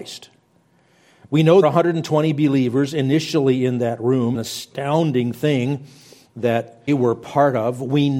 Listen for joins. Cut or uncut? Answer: cut